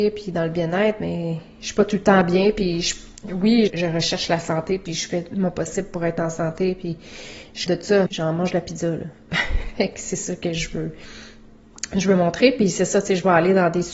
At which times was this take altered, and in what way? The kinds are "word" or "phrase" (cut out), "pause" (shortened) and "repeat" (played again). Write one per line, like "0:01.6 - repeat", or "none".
0:03.7 - word
0:07.7 - word
0:08.1 - word